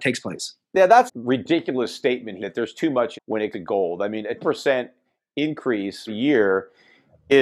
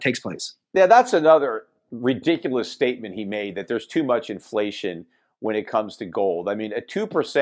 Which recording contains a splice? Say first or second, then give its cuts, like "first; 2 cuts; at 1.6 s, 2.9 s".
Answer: first; 6 cuts; at 1.1 s, 2.4 s, 3.1 s, 3.5 s, 4.4 s, 6.1 s